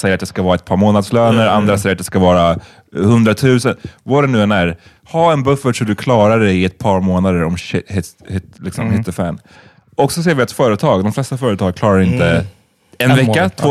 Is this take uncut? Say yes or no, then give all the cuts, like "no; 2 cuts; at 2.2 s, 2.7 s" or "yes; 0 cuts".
yes; 0 cuts